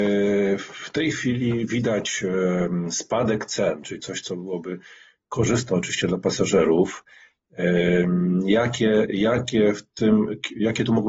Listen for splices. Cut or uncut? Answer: uncut